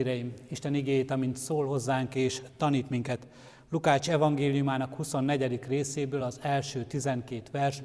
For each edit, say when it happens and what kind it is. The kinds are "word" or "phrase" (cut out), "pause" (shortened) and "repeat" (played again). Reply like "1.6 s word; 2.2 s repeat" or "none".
none